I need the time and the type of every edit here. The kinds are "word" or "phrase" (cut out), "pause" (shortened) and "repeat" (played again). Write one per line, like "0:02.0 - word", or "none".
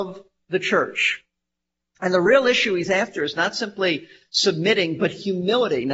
none